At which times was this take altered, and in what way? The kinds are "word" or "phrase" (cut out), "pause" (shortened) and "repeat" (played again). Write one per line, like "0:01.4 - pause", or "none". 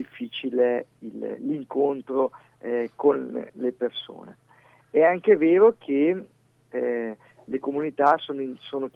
none